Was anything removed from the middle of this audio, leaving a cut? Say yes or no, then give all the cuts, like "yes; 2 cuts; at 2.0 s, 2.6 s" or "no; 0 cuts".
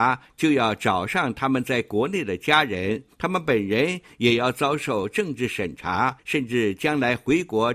yes; 2 cuts; at 3.1 s, 6.2 s